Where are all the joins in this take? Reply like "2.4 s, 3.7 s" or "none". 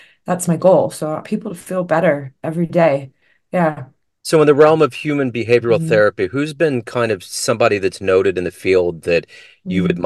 1.2 s